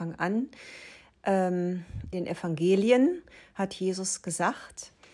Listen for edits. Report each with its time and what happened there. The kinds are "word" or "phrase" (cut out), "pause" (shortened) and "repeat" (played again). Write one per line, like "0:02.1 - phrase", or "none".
0:02.1 - word